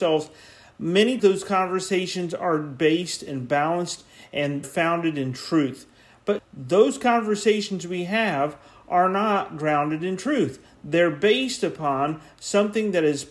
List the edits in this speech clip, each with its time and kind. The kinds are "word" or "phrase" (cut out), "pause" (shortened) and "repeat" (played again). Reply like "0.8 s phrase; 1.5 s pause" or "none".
1.2 s word; 4.6 s word; 6.4 s word